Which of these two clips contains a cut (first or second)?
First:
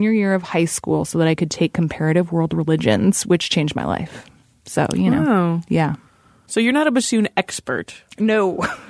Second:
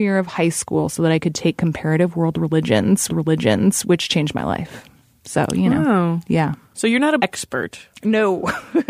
second